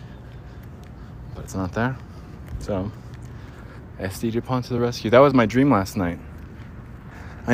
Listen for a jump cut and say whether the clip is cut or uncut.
uncut